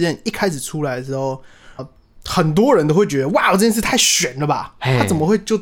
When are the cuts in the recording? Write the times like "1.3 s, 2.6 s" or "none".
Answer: 1.8 s